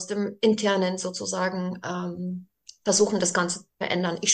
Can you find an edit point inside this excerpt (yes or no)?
yes